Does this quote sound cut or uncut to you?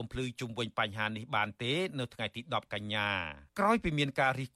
cut